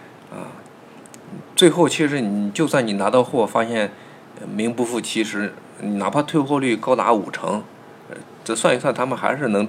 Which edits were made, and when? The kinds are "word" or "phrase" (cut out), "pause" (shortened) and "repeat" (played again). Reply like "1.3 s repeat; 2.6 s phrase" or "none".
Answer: none